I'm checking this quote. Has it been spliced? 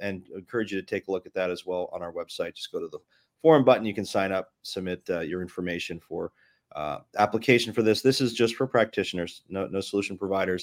no; 0 cuts

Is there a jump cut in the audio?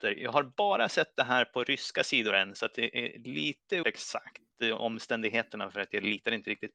yes; 1 cut; at 3.8 s

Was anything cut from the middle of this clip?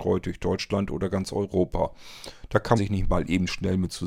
yes; 1 cut; at 2.8 s

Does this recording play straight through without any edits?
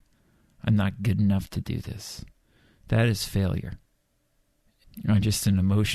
yes; 0 cuts

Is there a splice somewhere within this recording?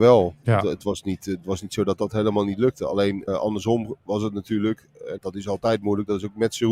yes; 2 cuts; at 3.3 s, 5.2 s

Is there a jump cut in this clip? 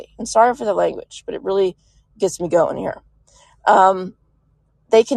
no; 0 cuts

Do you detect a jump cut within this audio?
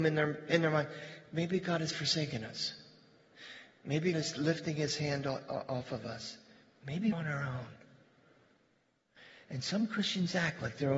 yes; 2 cuts; at 4.1 s, 7.1 s

